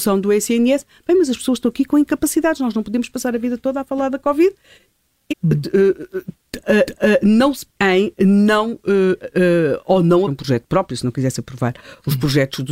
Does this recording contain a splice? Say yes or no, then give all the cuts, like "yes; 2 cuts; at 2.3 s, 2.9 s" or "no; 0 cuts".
yes; 4 cuts; at 5.3 s, 6.9 s, 7.7 s, 10.3 s